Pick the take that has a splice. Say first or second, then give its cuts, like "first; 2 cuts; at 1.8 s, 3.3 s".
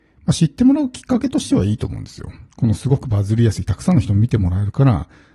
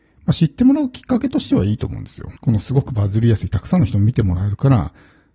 second; 1 cut; at 2.4 s